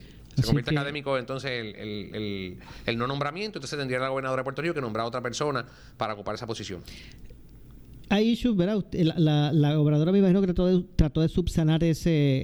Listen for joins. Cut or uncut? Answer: uncut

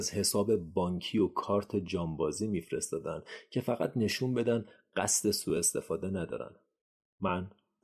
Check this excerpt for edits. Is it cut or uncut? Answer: uncut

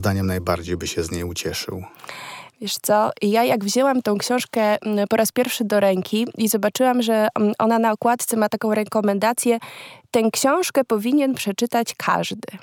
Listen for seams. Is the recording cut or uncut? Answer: uncut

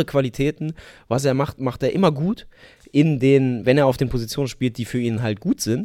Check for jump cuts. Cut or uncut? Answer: uncut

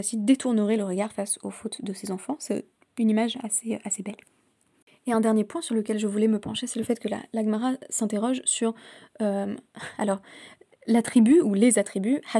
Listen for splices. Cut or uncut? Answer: uncut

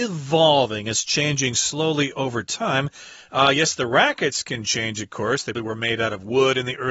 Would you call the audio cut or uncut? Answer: cut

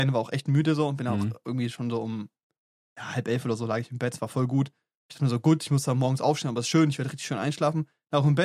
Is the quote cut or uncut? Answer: uncut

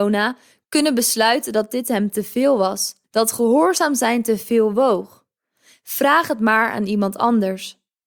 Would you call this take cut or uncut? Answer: cut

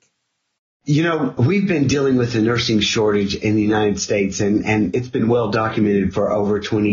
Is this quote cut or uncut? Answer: uncut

